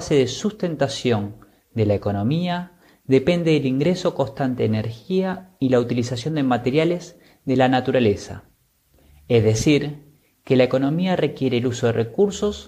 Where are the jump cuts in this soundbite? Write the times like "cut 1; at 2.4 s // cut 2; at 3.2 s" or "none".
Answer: none